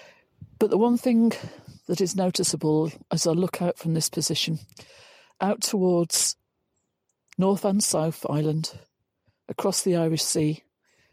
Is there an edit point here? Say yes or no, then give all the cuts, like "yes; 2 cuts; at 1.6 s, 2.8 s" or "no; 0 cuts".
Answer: no; 0 cuts